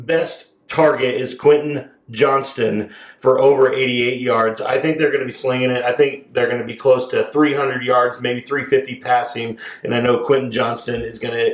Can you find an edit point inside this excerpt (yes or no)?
no